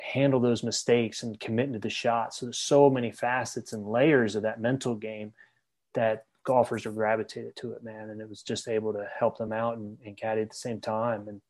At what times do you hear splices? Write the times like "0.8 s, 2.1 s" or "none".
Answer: none